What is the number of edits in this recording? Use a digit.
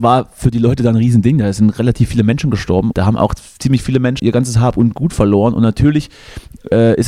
2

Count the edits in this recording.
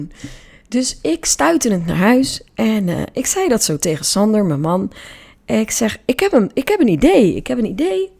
0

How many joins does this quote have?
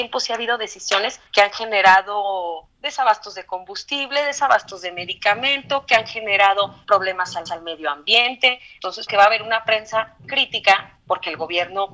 4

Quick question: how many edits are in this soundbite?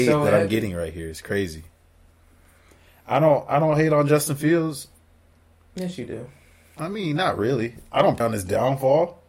1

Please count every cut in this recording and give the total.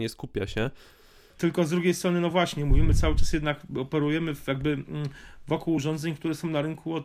0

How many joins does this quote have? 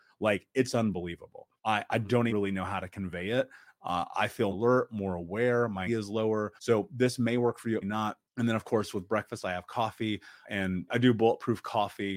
9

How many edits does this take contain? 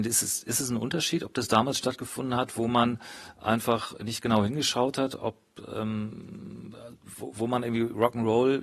0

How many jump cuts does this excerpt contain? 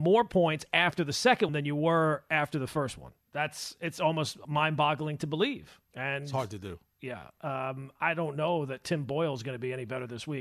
4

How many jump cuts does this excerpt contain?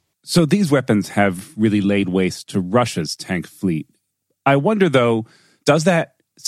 0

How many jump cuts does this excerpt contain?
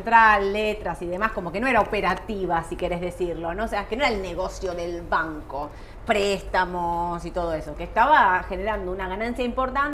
0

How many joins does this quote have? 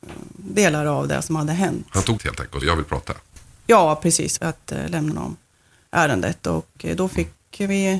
4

